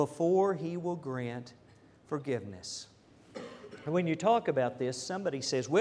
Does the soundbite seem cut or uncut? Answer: uncut